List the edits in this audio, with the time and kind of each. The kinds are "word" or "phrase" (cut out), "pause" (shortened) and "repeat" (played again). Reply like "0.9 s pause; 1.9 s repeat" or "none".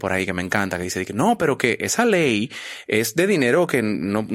none